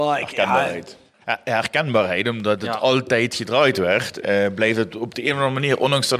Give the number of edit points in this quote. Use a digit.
0